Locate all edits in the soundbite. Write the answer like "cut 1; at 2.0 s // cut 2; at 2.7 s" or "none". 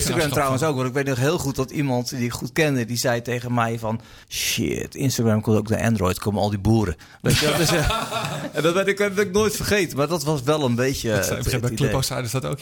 cut 1; at 4.2 s